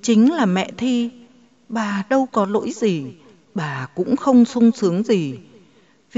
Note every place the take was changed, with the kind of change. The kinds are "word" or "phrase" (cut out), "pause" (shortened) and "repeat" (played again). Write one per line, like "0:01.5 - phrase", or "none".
none